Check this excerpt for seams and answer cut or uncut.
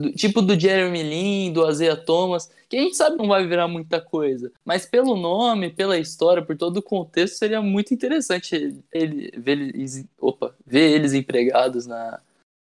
cut